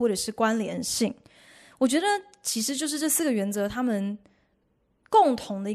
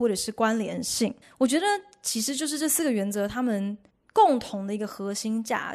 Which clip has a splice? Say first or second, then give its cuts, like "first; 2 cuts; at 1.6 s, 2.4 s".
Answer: second; 2 cuts; at 1.2 s, 3.9 s